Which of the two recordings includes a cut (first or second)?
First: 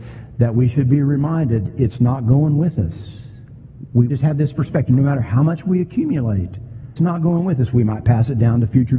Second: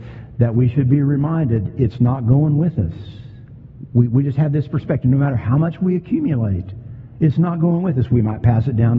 first